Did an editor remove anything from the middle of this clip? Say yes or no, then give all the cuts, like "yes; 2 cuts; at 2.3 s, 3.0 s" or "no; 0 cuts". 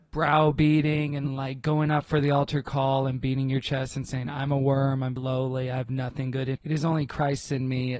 yes; 2 cuts; at 5.2 s, 6.6 s